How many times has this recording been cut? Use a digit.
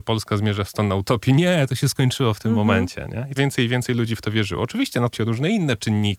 2